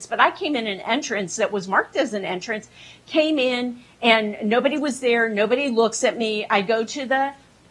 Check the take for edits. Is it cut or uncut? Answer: uncut